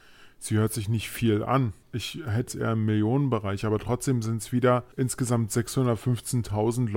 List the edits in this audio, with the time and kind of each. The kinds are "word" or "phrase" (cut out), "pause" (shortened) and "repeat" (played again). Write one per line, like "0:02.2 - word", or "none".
0:01.8 - pause
0:02.5 - word
0:04.9 - pause

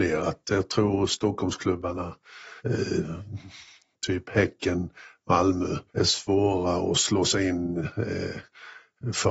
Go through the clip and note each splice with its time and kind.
0:02.6 - pause
0:05.9 - pause

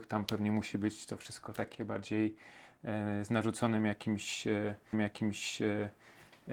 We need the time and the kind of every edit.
0:04.9 - repeat

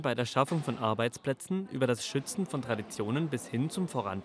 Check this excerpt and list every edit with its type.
none

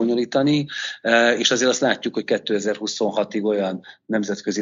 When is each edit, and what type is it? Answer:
none

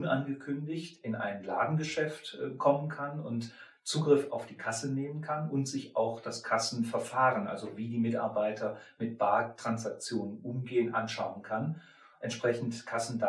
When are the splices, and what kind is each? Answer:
none

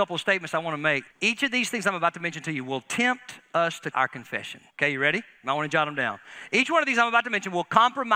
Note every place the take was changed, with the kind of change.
0:01.1 - pause
0:03.9 - word
0:04.7 - pause

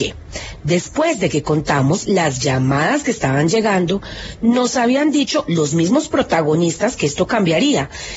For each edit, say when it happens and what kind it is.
none

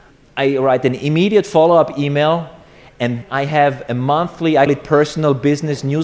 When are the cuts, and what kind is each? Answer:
0:03.2 - word
0:04.7 - word

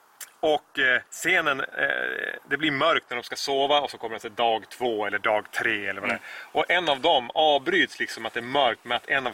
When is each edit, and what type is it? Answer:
0:01.1 - pause

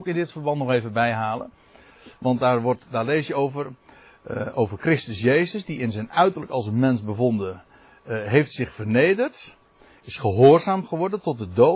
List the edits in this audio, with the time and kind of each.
none

